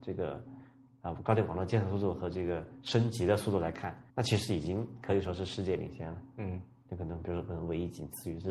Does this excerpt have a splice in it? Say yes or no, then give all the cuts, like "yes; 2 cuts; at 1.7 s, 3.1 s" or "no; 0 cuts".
yes; 1 cut; at 4.1 s